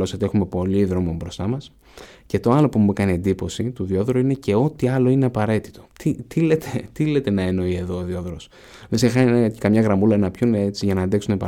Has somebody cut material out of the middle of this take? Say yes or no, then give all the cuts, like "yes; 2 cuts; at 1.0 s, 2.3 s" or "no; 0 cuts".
yes; 1 cut; at 5.8 s